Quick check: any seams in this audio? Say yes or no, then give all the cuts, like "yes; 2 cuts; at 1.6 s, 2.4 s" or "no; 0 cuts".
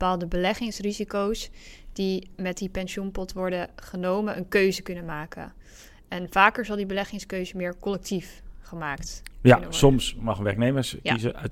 no; 0 cuts